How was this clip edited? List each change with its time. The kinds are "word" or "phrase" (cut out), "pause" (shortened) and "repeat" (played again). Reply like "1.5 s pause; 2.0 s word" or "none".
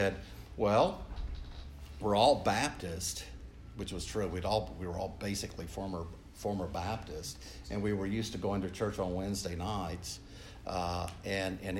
none